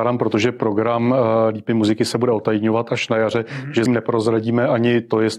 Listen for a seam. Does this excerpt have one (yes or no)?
yes